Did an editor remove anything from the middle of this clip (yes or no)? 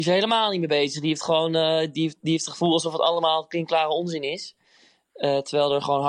no